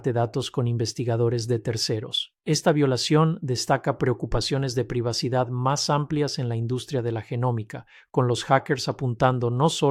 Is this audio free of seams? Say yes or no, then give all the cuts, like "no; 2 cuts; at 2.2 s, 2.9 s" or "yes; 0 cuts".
no; 1 cut; at 2.4 s